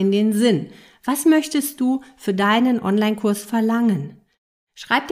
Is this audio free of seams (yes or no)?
yes